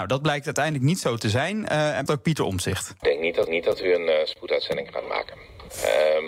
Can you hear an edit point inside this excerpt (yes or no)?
yes